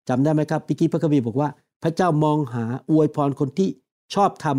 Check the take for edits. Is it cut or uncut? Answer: uncut